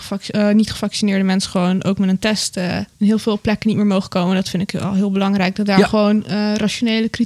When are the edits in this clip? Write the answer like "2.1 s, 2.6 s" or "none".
2.9 s